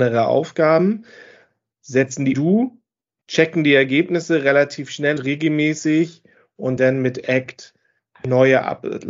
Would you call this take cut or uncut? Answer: cut